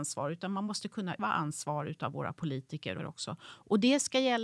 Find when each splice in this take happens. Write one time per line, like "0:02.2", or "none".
0:01.2
0:03.0